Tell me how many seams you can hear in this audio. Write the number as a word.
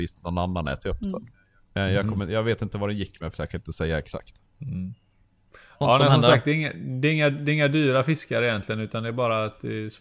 two